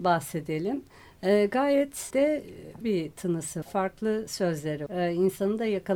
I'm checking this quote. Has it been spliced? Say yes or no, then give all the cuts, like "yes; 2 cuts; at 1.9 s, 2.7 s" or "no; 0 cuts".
yes; 4 cuts; at 2.1 s, 2.8 s, 3.6 s, 4.9 s